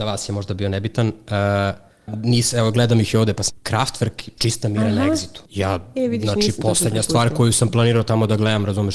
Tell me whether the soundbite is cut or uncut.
cut